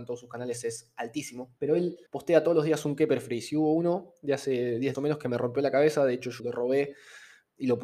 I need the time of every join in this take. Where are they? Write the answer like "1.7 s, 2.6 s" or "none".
1.6 s, 2.1 s, 4.9 s, 6.4 s